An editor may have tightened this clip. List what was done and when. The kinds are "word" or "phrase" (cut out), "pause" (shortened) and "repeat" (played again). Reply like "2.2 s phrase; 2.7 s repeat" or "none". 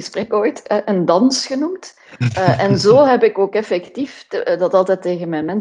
none